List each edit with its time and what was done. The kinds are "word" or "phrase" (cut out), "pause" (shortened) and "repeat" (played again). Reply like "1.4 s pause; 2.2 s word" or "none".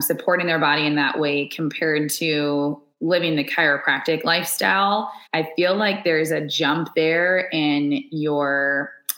2.9 s pause; 5.3 s pause